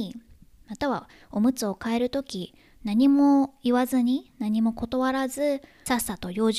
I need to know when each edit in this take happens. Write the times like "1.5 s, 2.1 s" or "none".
none